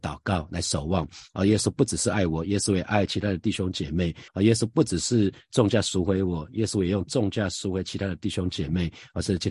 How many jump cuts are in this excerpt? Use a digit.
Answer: 1